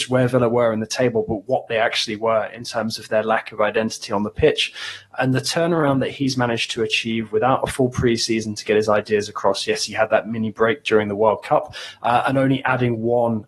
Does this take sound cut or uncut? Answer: uncut